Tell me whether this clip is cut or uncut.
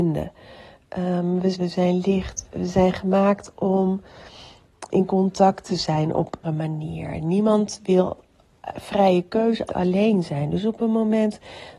cut